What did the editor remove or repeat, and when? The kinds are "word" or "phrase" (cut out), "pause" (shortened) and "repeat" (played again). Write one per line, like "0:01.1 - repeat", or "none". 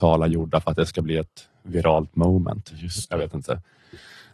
none

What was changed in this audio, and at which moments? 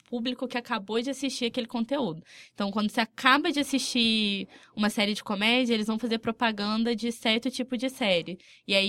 none

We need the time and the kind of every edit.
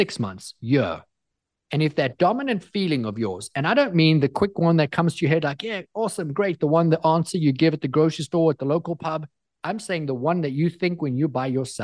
none

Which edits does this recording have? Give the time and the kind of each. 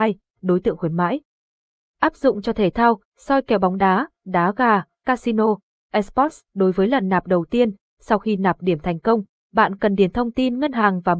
none

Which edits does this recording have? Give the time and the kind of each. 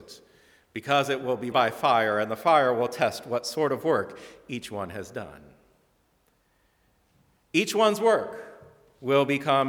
0:01.5 - word

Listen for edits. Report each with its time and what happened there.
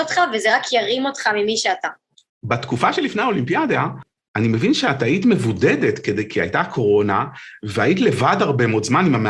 none

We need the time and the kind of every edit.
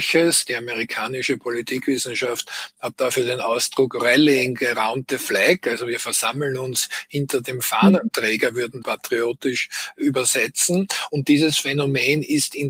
0:08.8 - phrase

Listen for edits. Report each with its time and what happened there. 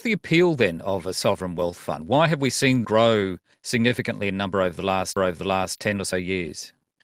0:02.8 - word
0:05.2 - repeat

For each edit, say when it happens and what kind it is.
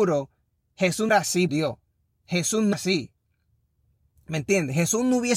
0:01.1 - word
0:01.5 - word
0:02.7 - word

